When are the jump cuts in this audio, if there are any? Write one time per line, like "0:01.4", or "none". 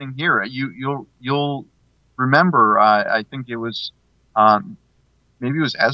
none